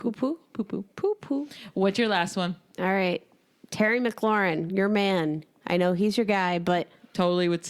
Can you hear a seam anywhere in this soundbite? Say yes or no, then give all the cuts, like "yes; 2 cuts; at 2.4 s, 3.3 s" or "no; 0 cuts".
no; 0 cuts